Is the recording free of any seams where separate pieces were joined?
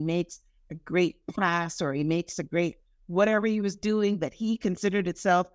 yes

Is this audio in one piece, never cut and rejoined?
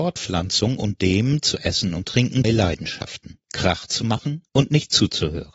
no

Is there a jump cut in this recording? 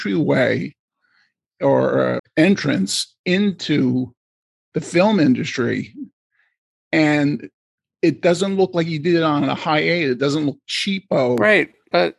yes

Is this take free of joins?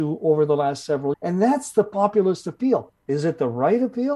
no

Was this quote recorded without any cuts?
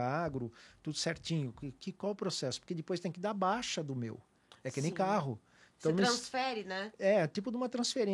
yes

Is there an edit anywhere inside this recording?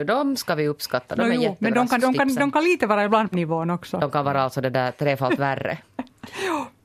yes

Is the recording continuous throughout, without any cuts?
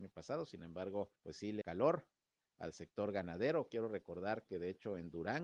no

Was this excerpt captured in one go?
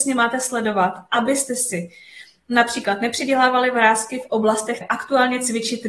no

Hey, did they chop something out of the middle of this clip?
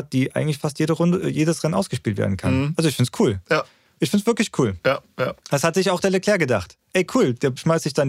no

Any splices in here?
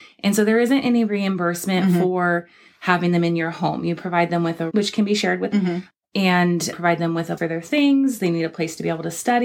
yes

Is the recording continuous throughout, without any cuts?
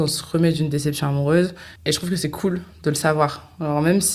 no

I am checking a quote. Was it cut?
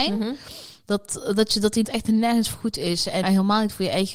yes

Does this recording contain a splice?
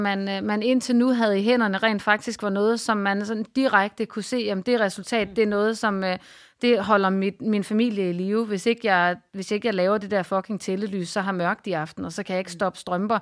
no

